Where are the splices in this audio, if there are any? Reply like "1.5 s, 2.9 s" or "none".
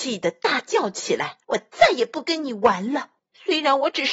1.4 s, 3.2 s